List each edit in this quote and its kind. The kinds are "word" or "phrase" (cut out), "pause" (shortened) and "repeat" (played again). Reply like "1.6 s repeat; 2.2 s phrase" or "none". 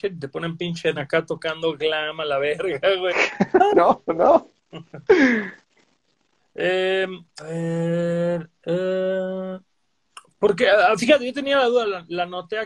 0.9 s word; 3.7 s word; 7.4 s word